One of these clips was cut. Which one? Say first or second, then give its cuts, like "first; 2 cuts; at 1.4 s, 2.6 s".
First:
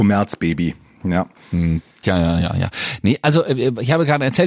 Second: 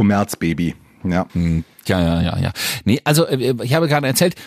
second; 1 cut; at 1.3 s